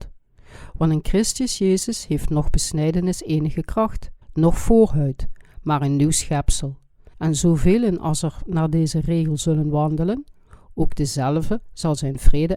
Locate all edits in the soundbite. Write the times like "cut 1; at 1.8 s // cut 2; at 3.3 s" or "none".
cut 1; at 4.2 s // cut 2; at 7.1 s